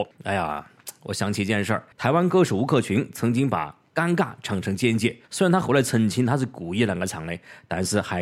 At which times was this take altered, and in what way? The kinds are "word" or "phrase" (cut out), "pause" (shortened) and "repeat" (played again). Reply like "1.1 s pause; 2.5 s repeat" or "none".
1.9 s pause; 5.2 s pause